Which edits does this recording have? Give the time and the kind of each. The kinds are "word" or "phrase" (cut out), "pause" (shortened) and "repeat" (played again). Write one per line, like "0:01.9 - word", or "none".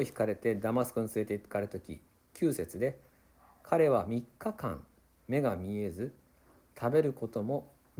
none